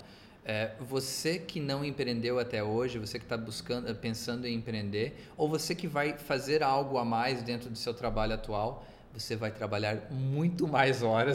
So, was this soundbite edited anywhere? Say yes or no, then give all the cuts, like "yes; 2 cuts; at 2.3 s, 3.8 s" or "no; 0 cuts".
no; 0 cuts